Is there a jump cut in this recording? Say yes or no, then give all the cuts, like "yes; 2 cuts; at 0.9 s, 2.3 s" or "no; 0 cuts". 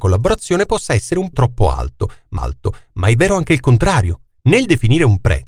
yes; 2 cuts; at 1.3 s, 2.4 s